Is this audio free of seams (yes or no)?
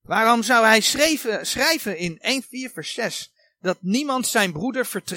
no